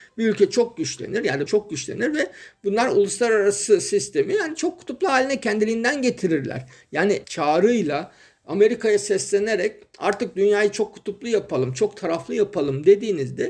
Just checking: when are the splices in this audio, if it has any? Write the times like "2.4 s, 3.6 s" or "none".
1.5 s, 7.2 s